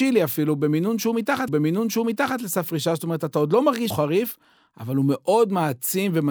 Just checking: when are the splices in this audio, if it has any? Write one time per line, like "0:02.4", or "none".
0:01.5
0:03.9